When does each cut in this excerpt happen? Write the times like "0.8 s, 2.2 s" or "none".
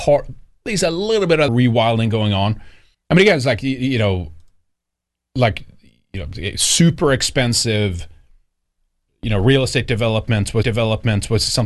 1.5 s, 2.9 s, 10.6 s